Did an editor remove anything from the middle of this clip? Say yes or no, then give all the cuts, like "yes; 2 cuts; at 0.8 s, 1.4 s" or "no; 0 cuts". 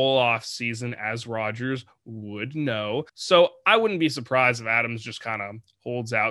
yes; 1 cut; at 3.1 s